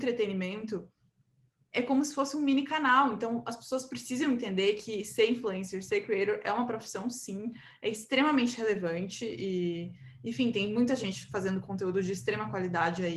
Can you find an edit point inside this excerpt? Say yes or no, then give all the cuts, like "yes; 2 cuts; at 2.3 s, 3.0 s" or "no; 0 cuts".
no; 0 cuts